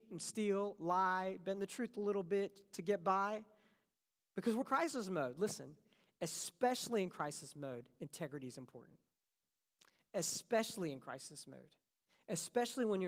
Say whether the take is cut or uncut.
cut